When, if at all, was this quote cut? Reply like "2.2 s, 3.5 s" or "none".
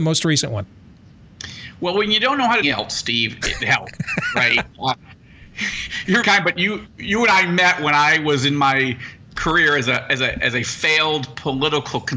2.6 s, 3.6 s, 4.8 s, 6.2 s, 6.9 s